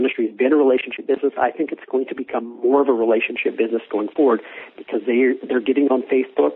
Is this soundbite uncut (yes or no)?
yes